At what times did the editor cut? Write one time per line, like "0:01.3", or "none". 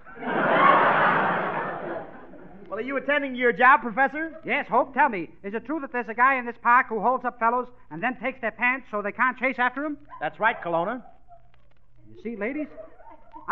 none